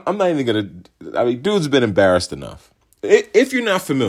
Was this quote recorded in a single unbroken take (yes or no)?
yes